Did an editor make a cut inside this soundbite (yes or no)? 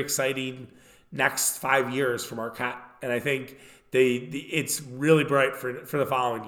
no